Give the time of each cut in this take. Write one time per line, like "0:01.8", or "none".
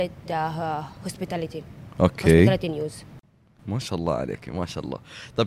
none